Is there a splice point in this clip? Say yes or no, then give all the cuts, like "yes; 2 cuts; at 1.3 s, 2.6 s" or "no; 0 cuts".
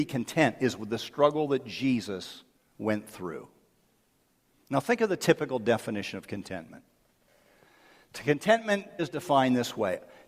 yes; 2 cuts; at 2.5 s, 9.0 s